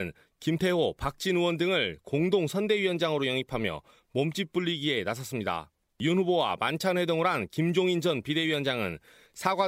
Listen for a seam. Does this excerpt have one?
no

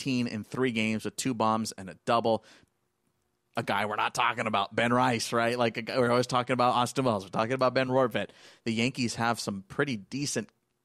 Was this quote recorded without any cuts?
yes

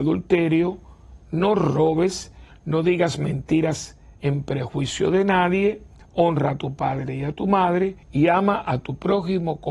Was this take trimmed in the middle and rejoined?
yes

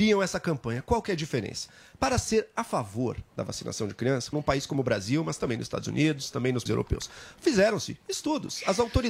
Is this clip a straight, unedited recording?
no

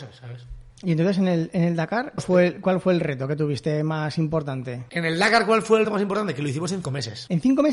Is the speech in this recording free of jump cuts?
no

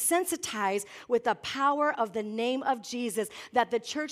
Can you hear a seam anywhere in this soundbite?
no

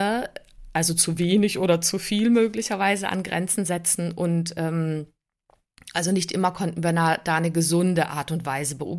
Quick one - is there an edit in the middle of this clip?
no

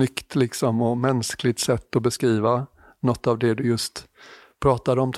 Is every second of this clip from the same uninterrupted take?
yes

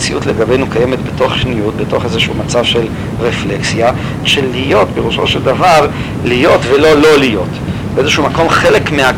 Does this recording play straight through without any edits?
no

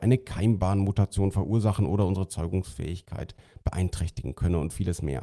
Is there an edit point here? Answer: no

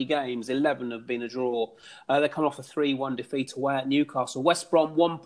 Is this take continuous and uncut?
yes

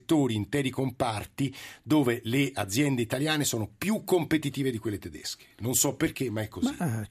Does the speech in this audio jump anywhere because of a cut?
no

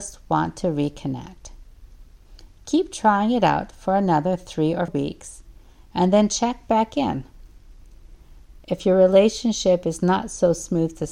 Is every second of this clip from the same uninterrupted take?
no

